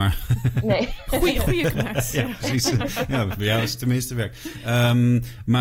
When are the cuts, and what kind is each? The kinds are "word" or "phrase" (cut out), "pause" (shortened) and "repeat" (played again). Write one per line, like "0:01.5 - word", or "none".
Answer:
0:01.7 - word